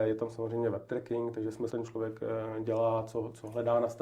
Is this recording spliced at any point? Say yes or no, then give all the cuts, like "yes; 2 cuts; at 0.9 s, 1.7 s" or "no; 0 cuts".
yes; 1 cut; at 1.7 s